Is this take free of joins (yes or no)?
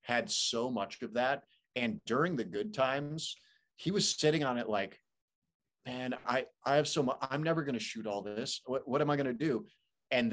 yes